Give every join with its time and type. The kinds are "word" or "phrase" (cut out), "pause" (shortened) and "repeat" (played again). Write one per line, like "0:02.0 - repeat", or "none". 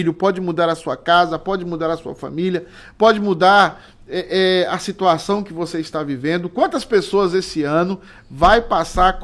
none